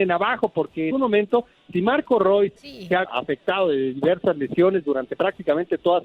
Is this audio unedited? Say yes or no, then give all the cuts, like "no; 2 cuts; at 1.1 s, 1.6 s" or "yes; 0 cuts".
no; 3 cuts; at 0.9 s, 2.6 s, 3.0 s